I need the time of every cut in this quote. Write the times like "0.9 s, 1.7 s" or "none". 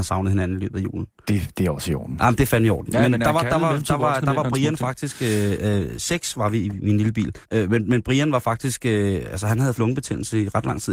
7.4 s, 9.7 s